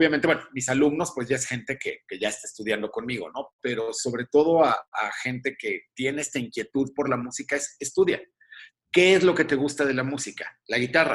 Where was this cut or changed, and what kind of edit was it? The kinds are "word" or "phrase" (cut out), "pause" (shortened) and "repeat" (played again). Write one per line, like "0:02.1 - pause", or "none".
none